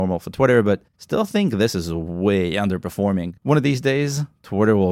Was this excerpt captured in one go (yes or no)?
no